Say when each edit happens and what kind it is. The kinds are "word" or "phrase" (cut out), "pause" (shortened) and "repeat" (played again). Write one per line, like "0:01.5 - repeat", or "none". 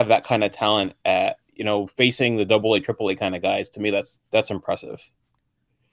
0:01.4 - pause
0:04.3 - pause